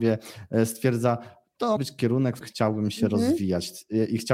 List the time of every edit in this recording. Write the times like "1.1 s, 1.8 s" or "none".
1.8 s, 2.4 s